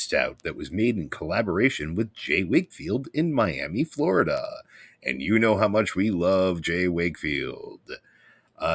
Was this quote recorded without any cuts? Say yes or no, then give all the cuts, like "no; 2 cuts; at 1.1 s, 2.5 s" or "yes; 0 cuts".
yes; 0 cuts